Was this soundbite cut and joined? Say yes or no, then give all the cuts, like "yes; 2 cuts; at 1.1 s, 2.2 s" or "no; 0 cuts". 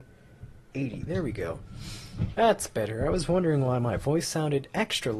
no; 0 cuts